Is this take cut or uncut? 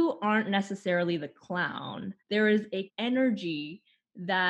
cut